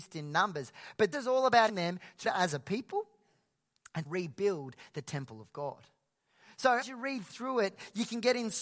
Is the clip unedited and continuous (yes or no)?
no